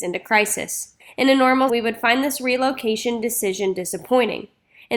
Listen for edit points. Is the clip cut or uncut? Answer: cut